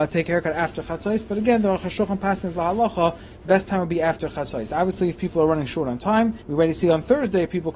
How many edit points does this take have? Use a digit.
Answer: 1